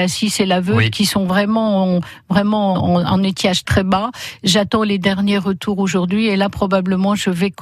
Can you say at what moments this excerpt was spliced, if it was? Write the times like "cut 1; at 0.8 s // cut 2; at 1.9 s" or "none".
cut 1; at 2.7 s // cut 2; at 3.6 s